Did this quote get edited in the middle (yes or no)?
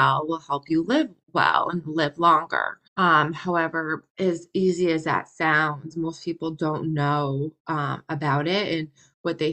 yes